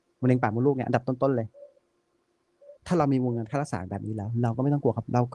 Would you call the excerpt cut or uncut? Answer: cut